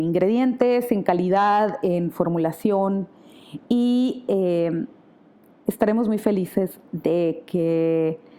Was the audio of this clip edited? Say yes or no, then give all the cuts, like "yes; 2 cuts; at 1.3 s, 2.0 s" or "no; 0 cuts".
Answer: no; 0 cuts